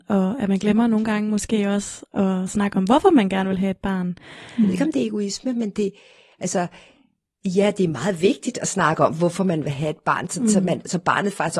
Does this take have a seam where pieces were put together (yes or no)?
no